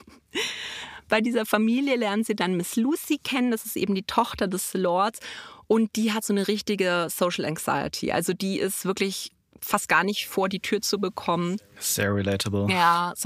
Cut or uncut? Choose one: uncut